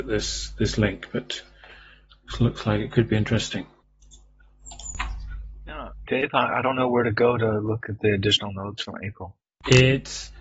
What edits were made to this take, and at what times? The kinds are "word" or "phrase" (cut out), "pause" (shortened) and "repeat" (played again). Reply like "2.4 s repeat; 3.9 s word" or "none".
6.1 s word